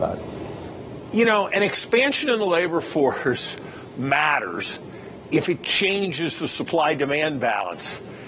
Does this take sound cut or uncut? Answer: uncut